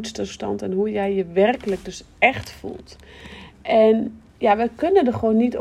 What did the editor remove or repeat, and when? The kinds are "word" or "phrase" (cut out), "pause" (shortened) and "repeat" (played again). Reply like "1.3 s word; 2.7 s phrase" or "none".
4.3 s pause